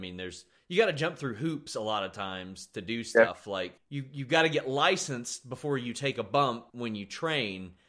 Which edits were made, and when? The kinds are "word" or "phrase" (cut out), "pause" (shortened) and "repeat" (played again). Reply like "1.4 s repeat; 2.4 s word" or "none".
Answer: 3.8 s pause; 6.7 s pause